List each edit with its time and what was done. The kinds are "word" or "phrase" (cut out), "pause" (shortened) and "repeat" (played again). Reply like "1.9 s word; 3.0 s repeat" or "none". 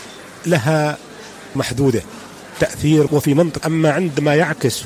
1.5 s word; 3.1 s word; 3.6 s word